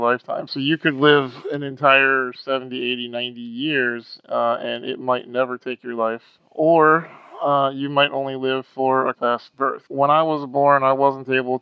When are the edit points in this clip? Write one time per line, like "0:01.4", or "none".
0:09.1
0:09.9